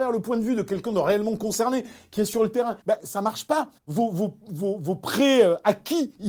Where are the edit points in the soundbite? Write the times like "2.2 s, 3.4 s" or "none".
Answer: 2.8 s, 3.8 s